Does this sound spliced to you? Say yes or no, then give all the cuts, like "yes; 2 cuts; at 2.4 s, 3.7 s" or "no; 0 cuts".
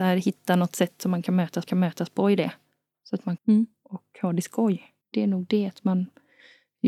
yes; 3 cuts; at 1.7 s, 3.4 s, 5.0 s